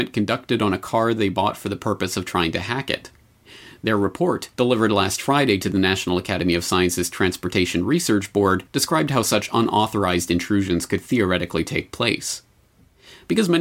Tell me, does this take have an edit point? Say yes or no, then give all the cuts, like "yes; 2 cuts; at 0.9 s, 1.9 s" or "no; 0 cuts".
yes; 2 cuts; at 4.5 s, 8.7 s